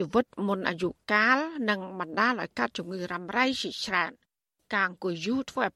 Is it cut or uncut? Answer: uncut